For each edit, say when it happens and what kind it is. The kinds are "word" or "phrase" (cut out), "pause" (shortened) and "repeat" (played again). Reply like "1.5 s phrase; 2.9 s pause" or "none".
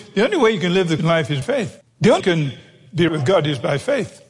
1.0 s word; 1.4 s word; 1.8 s pause; 2.2 s phrase; 3.1 s word